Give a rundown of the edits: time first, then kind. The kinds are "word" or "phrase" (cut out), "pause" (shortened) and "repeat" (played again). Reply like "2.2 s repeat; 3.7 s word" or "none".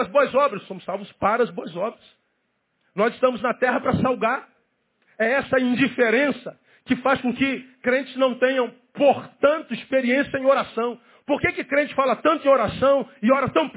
2.6 s pause